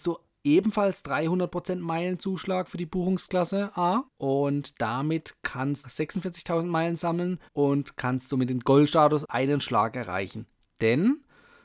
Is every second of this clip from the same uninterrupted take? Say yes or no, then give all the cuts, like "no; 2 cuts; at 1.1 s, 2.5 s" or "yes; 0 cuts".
no; 4 cuts; at 4.1 s, 5.8 s, 7.5 s, 9.2 s